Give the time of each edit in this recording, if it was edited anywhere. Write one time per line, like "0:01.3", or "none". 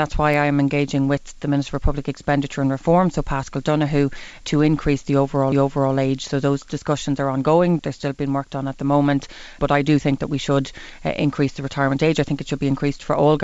0:04.4
0:05.5
0:07.8
0:09.6